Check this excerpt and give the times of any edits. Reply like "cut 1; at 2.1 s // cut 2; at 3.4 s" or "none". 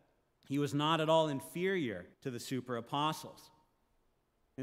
cut 1; at 2.1 s